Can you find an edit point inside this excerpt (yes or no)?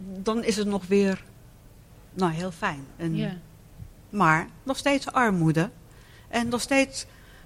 no